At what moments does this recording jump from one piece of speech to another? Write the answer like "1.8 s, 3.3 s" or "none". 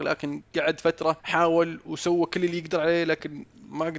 1.2 s